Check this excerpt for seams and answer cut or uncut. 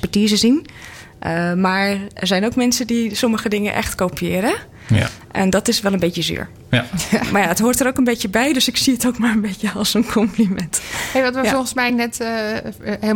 uncut